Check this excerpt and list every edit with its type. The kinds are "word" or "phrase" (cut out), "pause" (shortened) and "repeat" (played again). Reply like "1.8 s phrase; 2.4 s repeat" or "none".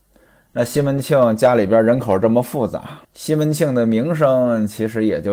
3.0 s pause